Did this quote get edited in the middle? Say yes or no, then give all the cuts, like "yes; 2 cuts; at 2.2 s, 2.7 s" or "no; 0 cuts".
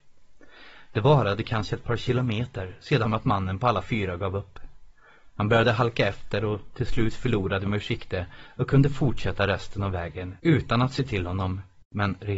yes; 3 cuts; at 3.1 s, 7.7 s, 10.4 s